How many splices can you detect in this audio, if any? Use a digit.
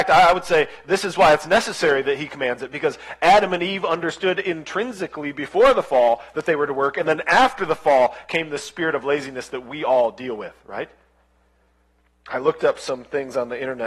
0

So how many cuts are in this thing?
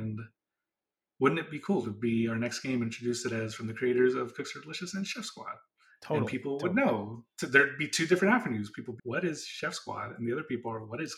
1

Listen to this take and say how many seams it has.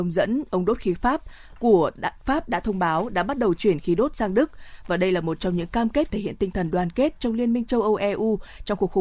1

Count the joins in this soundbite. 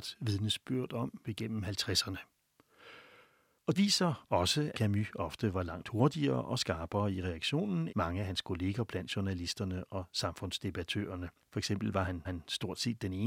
6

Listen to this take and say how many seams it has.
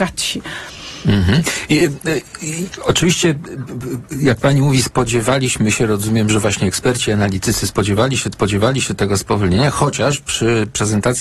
1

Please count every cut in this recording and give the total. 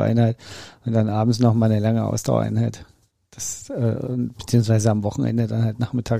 0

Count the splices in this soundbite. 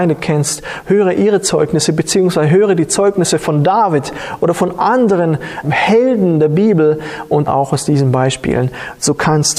2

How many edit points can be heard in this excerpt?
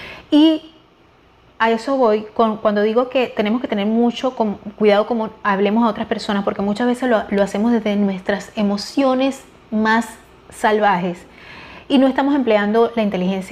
0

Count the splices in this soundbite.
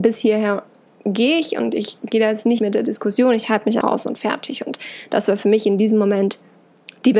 2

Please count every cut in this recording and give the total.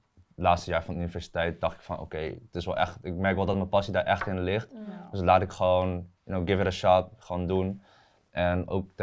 0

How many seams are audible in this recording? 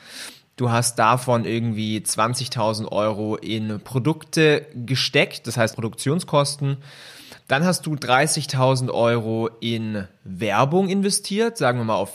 1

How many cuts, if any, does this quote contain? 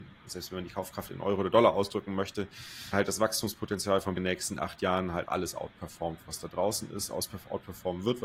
3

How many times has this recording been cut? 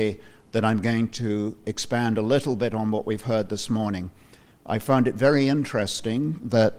0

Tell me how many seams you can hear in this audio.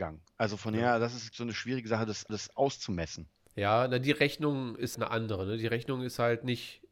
3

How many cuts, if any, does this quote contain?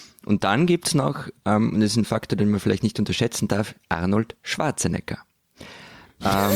0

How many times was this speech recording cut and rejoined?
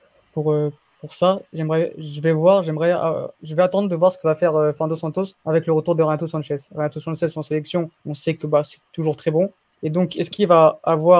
4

